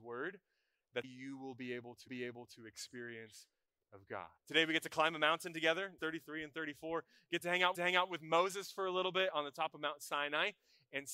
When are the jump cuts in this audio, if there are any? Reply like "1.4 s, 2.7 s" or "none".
1.0 s, 2.1 s, 3.8 s, 4.4 s, 6.0 s, 7.7 s